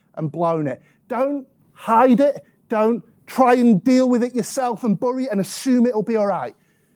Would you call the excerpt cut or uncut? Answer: uncut